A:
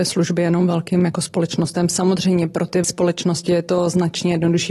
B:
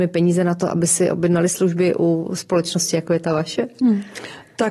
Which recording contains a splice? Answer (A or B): A